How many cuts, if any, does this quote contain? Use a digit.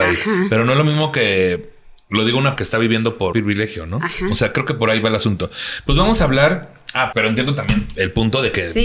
3